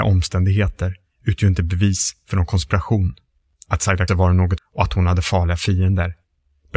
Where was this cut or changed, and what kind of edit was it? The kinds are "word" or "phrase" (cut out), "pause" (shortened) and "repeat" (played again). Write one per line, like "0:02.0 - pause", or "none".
0:04.1 - phrase
0:04.6 - phrase